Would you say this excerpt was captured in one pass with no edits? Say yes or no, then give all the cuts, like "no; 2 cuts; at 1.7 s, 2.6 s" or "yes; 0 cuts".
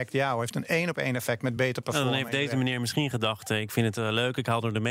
yes; 0 cuts